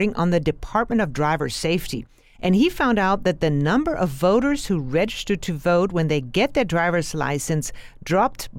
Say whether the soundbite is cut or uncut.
uncut